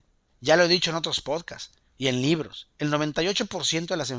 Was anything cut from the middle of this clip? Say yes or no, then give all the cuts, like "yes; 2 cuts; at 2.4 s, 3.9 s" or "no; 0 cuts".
no; 0 cuts